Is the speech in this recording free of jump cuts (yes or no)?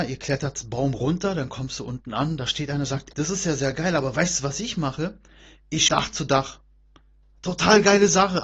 no